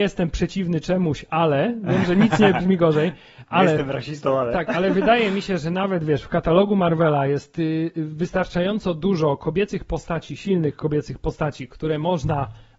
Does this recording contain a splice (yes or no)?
no